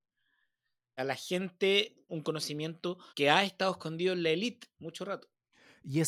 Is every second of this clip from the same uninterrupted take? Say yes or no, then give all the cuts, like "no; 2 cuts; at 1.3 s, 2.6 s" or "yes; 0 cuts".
no; 3 cuts; at 1.0 s, 2.1 s, 3.1 s